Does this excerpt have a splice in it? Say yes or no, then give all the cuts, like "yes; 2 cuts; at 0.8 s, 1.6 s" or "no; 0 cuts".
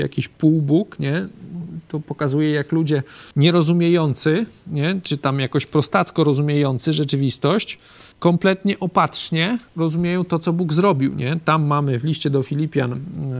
yes; 3 cuts; at 3.3 s, 8.1 s, 9.7 s